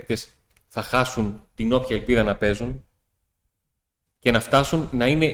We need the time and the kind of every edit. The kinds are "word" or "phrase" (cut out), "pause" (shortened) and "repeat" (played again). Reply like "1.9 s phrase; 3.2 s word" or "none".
none